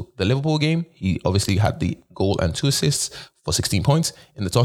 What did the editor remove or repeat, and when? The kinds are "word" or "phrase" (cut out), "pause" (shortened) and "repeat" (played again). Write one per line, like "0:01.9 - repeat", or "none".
none